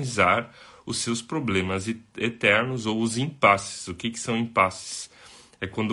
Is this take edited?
no; 0 cuts

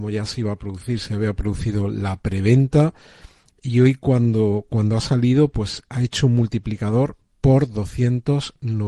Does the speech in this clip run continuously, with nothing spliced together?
yes; 0 cuts

